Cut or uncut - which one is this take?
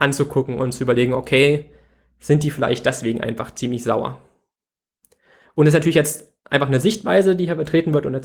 uncut